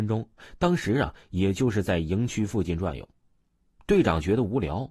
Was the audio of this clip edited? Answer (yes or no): no